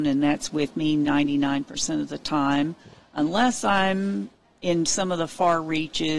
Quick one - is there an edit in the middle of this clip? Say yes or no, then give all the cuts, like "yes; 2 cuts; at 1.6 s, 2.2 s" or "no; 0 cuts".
no; 0 cuts